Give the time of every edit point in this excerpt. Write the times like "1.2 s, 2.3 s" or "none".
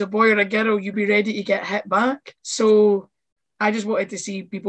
0.9 s, 2.4 s